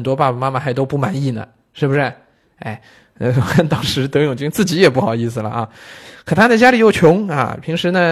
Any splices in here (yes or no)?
no